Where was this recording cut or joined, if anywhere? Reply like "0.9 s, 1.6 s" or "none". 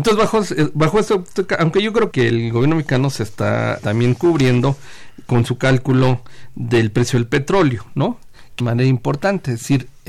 2.1 s, 3.8 s, 8.6 s

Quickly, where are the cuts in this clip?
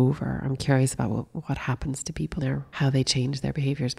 2.4 s

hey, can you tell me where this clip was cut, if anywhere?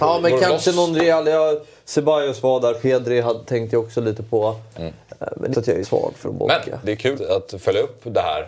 5.5 s, 5.8 s, 6.2 s, 6.8 s, 7.1 s

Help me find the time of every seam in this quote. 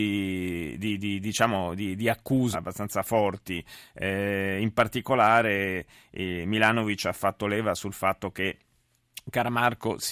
2.5 s

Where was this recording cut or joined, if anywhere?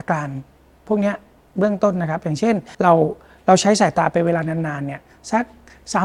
2.7 s

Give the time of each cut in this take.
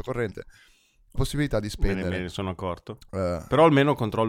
1.2 s

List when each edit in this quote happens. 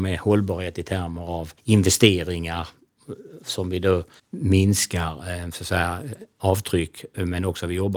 1.6 s, 4.2 s

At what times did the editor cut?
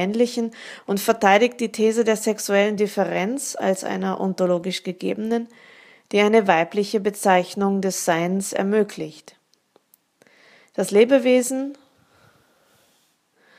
none

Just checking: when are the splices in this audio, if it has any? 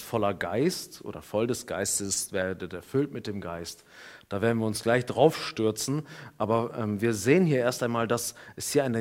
none

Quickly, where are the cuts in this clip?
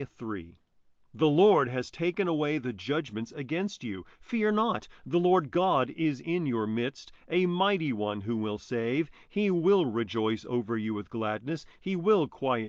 none

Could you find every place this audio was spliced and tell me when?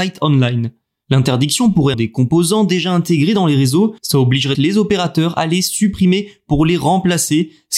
1.9 s, 4.0 s, 4.5 s

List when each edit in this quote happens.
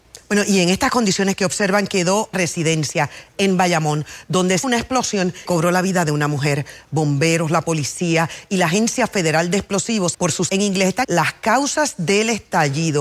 2.3 s, 4.6 s, 5.4 s, 10.1 s, 10.5 s, 11.0 s

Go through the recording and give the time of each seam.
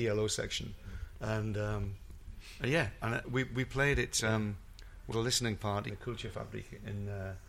3.2 s, 5.1 s, 5.9 s

